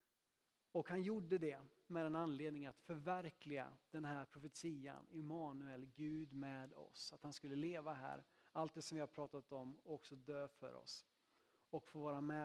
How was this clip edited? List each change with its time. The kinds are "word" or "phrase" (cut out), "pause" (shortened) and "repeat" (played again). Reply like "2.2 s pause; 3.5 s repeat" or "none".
none